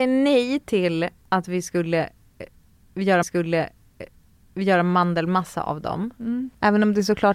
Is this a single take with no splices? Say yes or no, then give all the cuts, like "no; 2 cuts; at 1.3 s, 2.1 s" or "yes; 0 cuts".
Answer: no; 1 cut; at 3.2 s